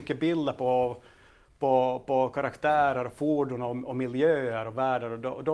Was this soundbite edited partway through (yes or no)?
no